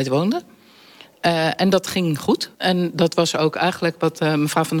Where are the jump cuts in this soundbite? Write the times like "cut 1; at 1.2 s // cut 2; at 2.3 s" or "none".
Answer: cut 1; at 2.5 s